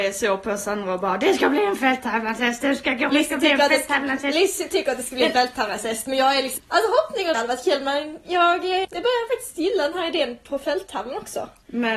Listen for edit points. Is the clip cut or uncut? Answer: cut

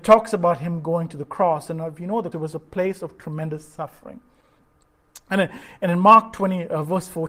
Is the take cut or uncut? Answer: cut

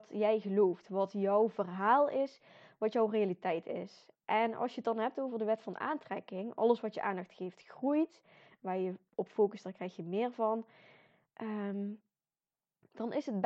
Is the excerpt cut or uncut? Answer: uncut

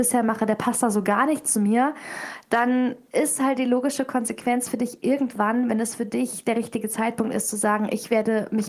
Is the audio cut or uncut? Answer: uncut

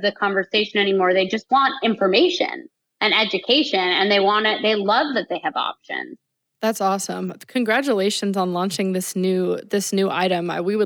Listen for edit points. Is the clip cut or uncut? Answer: uncut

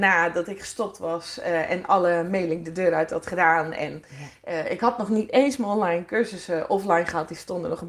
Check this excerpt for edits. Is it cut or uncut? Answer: uncut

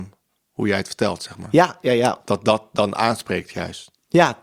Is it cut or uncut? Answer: uncut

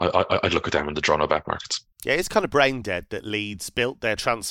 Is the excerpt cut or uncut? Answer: cut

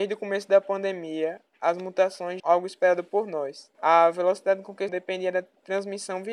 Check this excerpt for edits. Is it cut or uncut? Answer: cut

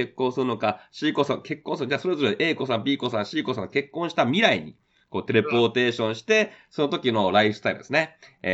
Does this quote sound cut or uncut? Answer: uncut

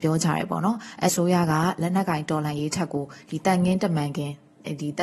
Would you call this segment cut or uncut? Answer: cut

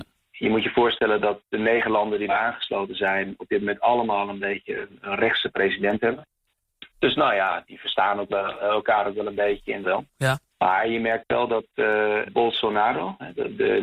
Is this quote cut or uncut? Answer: cut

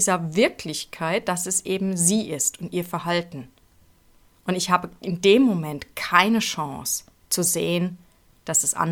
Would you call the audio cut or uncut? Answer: uncut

